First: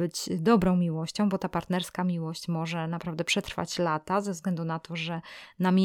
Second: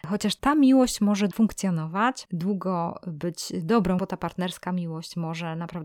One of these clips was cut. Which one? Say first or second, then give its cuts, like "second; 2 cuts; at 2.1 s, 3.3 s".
second; 3 cuts; at 1.3 s, 2.3 s, 4.0 s